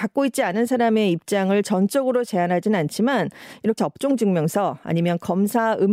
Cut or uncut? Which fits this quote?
cut